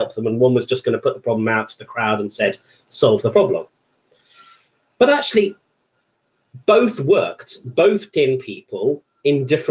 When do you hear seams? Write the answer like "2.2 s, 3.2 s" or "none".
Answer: 8.1 s